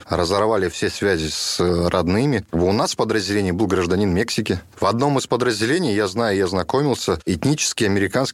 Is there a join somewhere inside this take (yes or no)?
no